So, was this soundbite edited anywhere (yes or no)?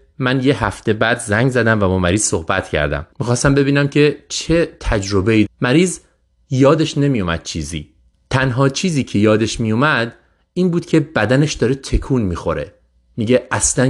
yes